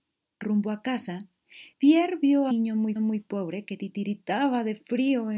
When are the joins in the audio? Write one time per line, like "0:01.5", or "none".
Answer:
0:01.7
0:02.5
0:03.0